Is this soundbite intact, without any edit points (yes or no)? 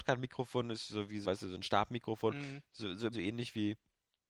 no